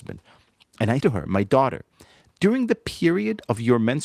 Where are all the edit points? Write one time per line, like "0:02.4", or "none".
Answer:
0:01.0